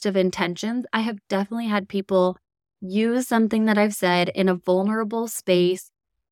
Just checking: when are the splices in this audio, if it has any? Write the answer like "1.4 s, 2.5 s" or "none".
none